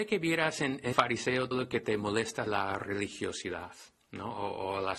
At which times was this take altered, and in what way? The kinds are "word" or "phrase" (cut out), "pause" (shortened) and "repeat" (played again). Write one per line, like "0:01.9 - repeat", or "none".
0:00.9 - word
0:01.5 - word
0:02.5 - word